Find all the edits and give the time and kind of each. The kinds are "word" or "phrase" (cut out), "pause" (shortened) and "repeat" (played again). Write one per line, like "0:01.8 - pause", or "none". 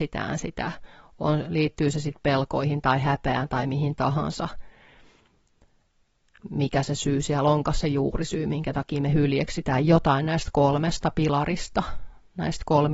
none